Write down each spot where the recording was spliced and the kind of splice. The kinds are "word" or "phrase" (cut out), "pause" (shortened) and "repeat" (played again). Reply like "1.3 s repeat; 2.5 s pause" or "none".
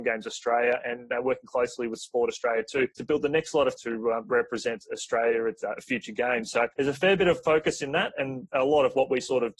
2.9 s pause; 3.8 s word; 6.7 s pause